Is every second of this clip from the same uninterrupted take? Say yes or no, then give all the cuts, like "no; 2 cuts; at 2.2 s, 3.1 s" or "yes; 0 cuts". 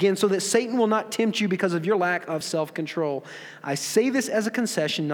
yes; 0 cuts